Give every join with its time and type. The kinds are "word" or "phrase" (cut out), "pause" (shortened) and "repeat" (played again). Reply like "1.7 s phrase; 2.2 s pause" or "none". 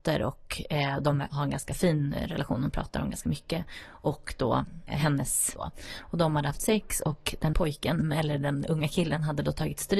5.6 s word; 7.5 s word